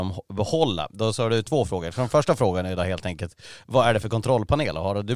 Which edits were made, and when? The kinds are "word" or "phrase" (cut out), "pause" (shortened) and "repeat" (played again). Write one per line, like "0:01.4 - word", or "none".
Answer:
none